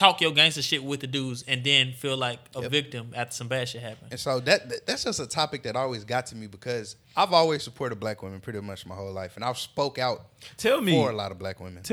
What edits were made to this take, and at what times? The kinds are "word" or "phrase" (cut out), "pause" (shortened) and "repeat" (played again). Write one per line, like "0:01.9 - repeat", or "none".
0:07.0 - pause